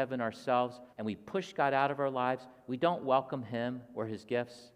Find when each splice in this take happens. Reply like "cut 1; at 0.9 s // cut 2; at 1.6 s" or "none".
cut 1; at 0.9 s